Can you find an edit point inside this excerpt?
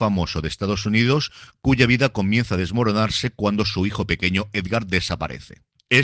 no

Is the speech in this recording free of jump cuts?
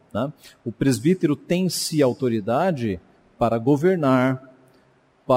yes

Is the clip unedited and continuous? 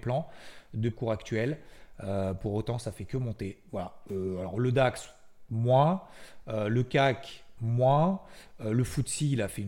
no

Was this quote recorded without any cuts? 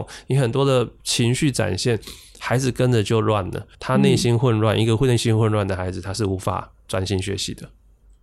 no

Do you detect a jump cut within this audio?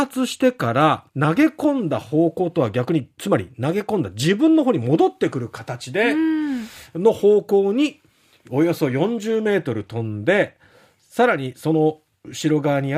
yes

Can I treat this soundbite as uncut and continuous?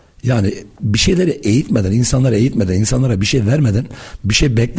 yes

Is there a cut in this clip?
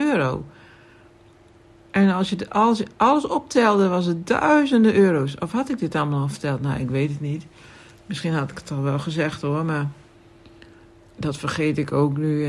no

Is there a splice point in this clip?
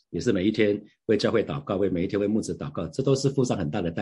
no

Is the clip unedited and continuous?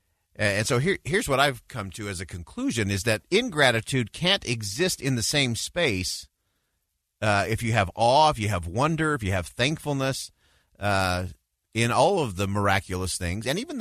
yes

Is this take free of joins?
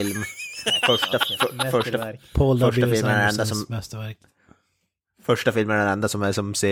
yes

